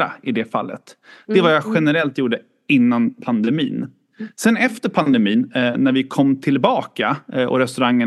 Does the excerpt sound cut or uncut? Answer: uncut